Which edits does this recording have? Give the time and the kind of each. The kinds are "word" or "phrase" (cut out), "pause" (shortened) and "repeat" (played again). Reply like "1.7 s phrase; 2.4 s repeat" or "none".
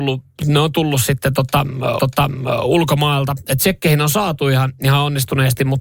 2.0 s repeat